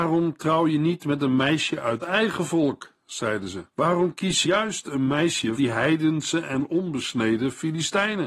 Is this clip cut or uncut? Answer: cut